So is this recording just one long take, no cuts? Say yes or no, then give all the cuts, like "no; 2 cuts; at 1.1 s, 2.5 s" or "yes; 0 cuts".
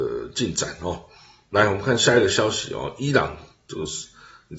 yes; 0 cuts